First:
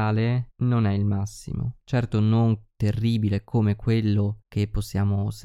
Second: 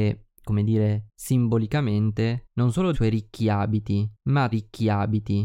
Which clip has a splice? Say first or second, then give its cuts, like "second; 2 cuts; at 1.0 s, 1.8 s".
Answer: second; 2 cuts; at 2.9 s, 4.5 s